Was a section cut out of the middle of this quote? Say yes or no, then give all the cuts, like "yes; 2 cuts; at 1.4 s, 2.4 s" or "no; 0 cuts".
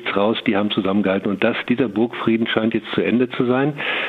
no; 0 cuts